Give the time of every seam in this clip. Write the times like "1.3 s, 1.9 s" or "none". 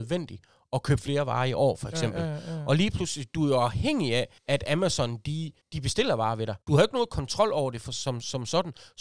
4.4 s, 5.6 s, 6.6 s